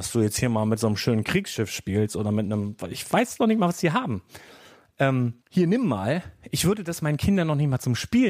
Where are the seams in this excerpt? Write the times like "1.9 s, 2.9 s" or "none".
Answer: 5.4 s